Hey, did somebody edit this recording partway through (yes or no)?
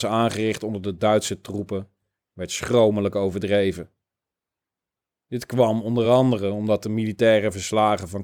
no